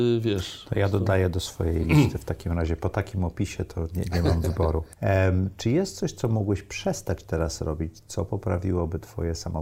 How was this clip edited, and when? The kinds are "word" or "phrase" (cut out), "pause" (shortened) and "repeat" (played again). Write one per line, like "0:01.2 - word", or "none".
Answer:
none